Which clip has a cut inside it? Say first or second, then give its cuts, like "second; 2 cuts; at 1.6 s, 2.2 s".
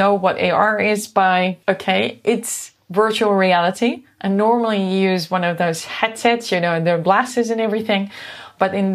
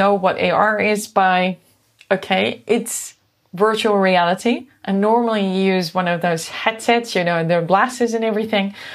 first; 2 cuts; at 1.6 s, 2.8 s